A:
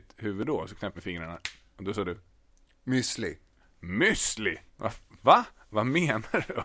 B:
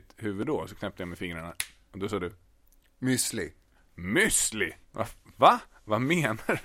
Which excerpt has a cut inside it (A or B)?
A